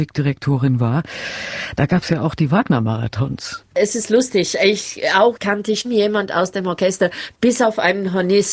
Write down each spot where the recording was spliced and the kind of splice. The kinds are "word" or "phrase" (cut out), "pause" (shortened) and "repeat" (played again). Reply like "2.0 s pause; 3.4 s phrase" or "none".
5.4 s word; 5.8 s word